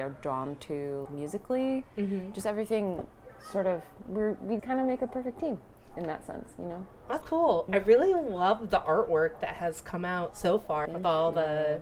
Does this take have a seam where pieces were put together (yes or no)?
yes